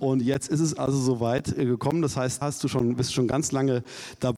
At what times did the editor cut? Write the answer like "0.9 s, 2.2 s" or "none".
2.4 s